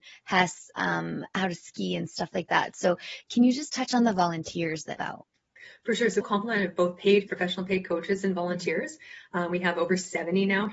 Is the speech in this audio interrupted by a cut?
yes; 3 cuts; at 5.0 s, 6.2 s, 7.3 s

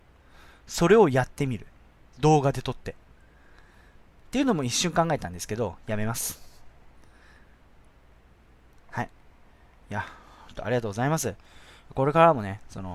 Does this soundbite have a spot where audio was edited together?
no; 0 cuts

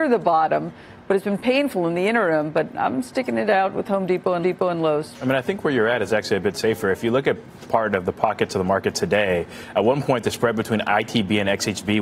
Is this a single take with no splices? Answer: no; 1 cut; at 4.4 s

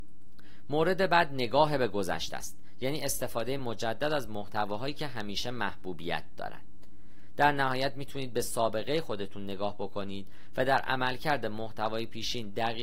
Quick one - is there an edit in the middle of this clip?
no; 0 cuts

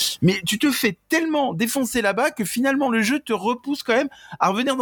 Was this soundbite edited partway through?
no; 0 cuts

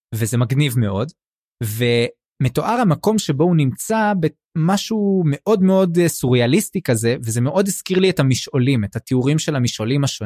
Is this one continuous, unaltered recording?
yes; 0 cuts

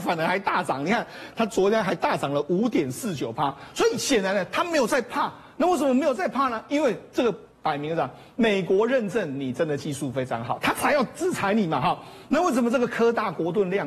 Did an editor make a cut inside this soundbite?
yes; 1 cut; at 7.5 s

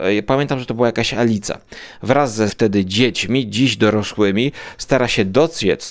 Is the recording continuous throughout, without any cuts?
no; 1 cut; at 2.5 s

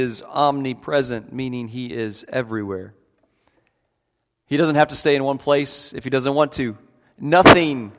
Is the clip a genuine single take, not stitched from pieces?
yes; 0 cuts

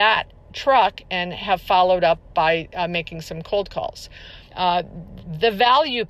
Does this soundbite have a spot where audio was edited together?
yes; 1 cut; at 4.5 s

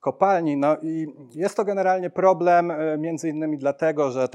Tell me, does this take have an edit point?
no; 0 cuts

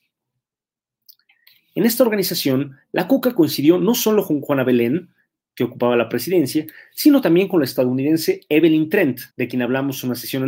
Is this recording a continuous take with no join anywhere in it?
no; 1 cut; at 9.3 s

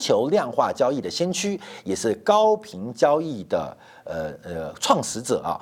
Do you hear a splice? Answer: no; 0 cuts

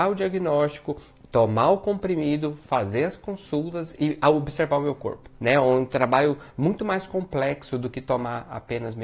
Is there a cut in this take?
yes; 1 cut; at 5.3 s

